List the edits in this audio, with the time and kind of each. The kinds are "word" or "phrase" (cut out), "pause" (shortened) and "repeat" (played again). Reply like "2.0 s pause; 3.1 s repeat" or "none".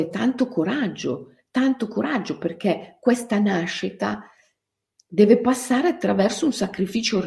none